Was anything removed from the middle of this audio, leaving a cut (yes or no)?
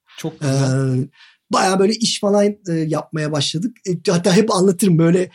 no